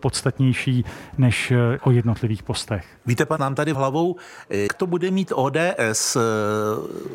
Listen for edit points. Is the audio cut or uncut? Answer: cut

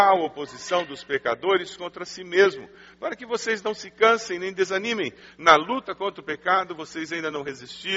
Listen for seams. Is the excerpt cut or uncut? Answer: uncut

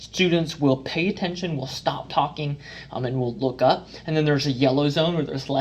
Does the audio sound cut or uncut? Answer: uncut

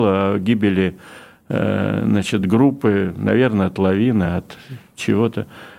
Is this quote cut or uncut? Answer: uncut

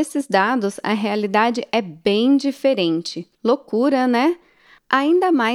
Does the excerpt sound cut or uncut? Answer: cut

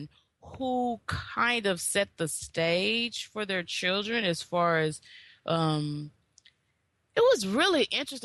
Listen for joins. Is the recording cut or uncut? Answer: uncut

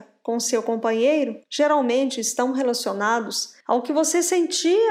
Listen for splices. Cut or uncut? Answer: cut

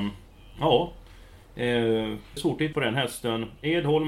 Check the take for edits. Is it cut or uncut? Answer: cut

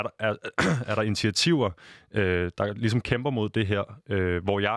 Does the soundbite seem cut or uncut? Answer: cut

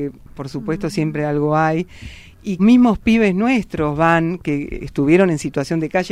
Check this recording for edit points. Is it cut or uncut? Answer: cut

